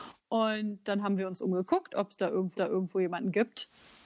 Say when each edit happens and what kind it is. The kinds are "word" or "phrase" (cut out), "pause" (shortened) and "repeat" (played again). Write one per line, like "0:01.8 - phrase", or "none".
0:02.5 - repeat